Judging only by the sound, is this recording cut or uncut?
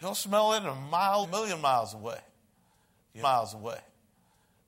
cut